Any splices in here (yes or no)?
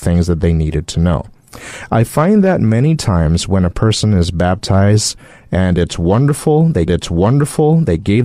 yes